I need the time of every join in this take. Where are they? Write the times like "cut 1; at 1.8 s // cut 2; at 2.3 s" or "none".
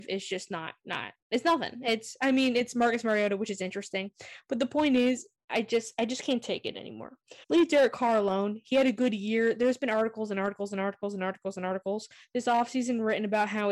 cut 1; at 1.2 s // cut 2; at 7.4 s